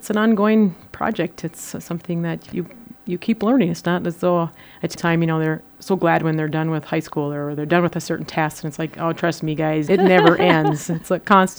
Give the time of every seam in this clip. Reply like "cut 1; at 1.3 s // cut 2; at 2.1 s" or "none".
cut 1; at 2.5 s // cut 2; at 5.0 s // cut 3; at 9.9 s